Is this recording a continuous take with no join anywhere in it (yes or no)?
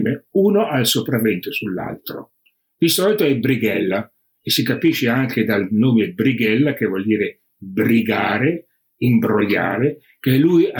yes